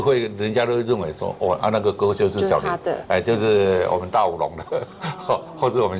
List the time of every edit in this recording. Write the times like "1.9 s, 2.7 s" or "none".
none